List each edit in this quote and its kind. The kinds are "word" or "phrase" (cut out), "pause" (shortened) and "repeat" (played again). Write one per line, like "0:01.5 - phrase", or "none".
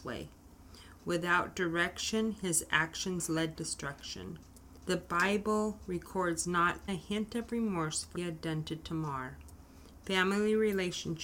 0:03.5 - phrase
0:06.9 - word
0:08.1 - word